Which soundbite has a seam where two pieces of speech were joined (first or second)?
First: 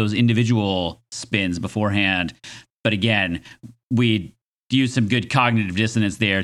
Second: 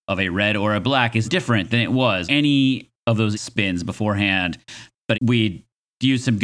second